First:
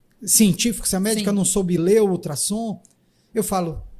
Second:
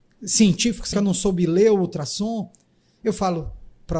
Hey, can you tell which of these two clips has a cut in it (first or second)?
second